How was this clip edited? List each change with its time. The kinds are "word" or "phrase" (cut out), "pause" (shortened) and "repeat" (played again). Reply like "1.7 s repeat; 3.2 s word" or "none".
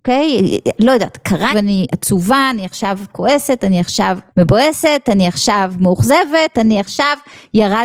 1.5 s phrase; 4.3 s pause